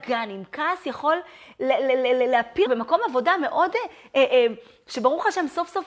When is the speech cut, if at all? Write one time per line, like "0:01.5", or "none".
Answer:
0:02.7